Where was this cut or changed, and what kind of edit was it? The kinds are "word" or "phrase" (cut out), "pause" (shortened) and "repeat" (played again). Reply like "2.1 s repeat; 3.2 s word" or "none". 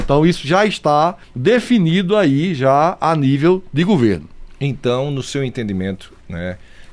1.2 s pause